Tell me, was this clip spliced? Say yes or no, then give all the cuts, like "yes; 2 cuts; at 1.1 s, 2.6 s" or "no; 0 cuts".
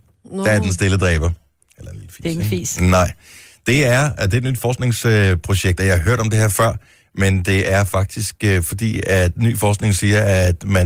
no; 0 cuts